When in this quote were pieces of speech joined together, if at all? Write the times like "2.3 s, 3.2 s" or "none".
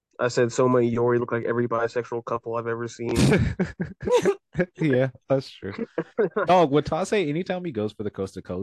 none